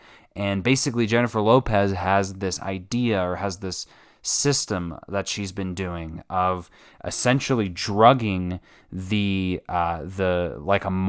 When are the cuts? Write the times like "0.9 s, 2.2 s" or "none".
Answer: none